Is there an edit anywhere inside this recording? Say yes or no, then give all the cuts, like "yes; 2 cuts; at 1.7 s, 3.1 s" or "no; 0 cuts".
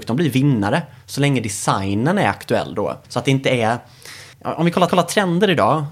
yes; 3 cuts; at 3.0 s, 4.3 s, 4.9 s